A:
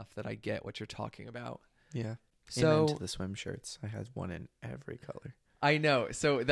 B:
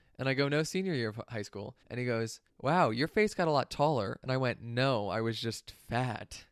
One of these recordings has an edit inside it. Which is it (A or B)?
B